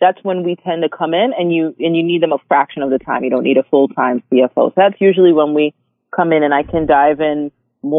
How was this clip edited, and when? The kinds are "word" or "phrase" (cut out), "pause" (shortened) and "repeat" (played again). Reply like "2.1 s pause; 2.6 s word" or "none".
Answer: none